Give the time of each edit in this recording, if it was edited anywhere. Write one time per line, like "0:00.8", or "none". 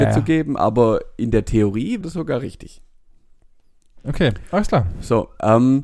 0:02.0